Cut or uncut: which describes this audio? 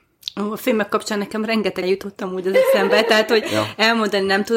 cut